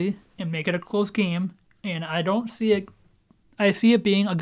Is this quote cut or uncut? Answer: uncut